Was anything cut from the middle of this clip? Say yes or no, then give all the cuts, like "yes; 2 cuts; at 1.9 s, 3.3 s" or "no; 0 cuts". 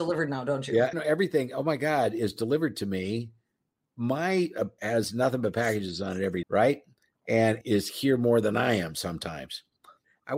yes; 4 cuts; at 0.9 s, 4.8 s, 6.4 s, 7.6 s